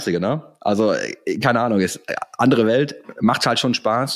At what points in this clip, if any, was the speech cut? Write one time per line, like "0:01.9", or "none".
none